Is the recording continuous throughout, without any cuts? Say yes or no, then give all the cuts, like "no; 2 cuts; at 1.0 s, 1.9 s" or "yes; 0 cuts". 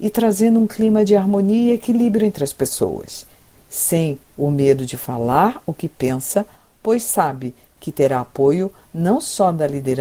yes; 0 cuts